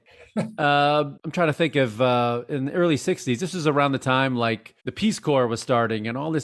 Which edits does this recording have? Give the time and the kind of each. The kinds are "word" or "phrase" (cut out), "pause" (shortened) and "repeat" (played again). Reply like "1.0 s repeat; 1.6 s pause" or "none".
1.2 s word; 4.8 s pause